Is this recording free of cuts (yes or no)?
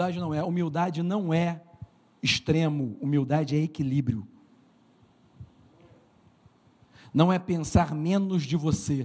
yes